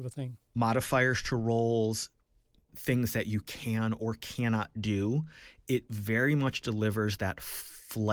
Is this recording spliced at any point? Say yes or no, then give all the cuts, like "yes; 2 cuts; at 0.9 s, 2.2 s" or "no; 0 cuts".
no; 0 cuts